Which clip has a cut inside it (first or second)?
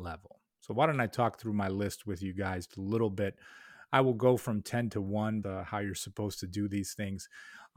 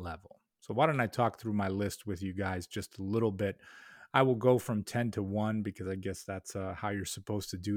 first